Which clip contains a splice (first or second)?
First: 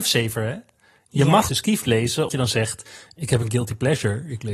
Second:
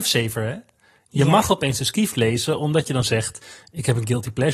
first